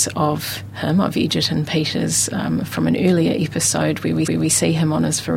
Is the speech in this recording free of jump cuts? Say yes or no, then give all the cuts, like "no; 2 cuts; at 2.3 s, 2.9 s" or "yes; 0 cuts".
no; 1 cut; at 4.2 s